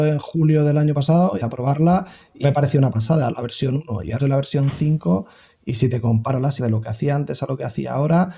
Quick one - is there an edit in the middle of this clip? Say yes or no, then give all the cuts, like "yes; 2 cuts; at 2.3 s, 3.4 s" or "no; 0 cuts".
yes; 4 cuts; at 1.4 s, 2.4 s, 4.2 s, 6.6 s